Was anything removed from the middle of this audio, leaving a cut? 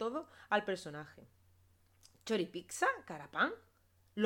no; 0 cuts

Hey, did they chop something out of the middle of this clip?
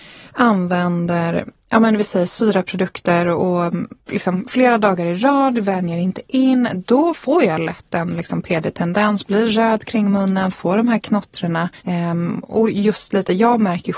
yes; 2 cuts; at 4.0 s, 11.8 s

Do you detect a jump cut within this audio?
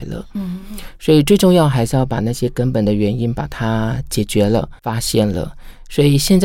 yes; 1 cut; at 4.8 s

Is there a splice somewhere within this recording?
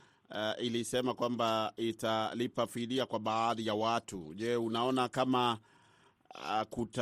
no; 0 cuts

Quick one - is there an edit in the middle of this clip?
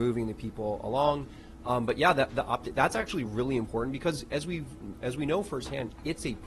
no; 0 cuts

